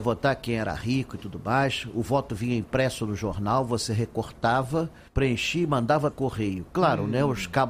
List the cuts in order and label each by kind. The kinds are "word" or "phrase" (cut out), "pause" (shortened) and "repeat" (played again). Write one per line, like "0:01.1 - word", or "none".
0:05.1 - pause
0:06.1 - word

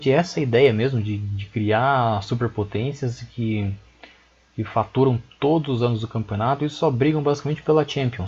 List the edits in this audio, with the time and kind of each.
none

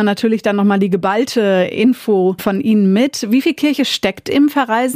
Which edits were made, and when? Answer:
none

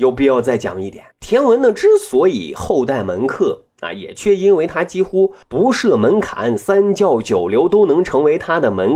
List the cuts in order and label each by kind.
0:01.1 - pause
0:05.4 - pause

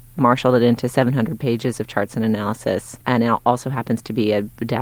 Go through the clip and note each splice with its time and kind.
0:03.0 - pause

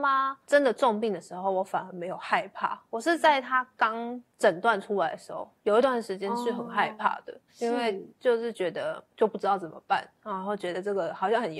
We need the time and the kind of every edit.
0:04.3 - pause
0:07.5 - pause

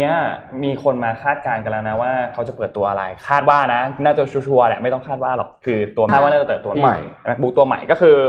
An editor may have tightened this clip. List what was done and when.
0:06.1 - word
0:06.7 - word

